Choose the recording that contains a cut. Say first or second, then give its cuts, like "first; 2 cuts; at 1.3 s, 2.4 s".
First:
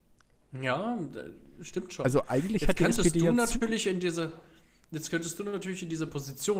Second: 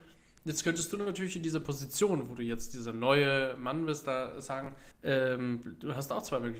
second; 1 cut; at 4.9 s